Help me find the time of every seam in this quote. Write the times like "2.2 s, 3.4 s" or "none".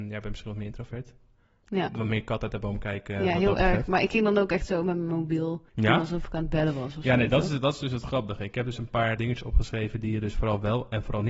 5.7 s, 9.2 s

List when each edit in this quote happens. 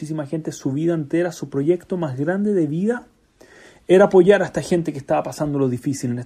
none

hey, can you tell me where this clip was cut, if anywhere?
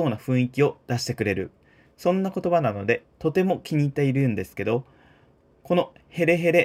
none

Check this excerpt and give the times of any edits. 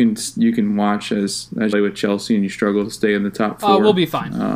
1.7 s

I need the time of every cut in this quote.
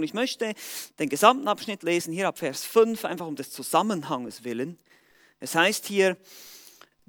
none

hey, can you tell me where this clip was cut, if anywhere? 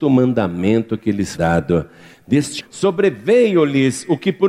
1.3 s, 2.6 s

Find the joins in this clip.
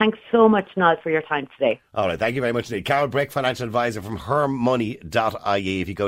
none

